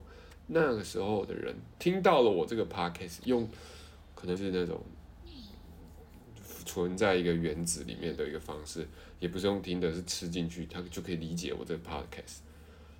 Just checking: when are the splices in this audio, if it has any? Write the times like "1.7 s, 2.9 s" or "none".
4.4 s